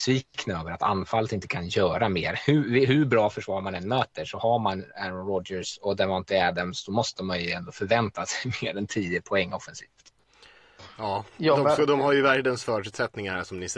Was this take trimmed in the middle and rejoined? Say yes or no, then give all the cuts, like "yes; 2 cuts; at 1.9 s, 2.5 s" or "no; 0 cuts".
no; 0 cuts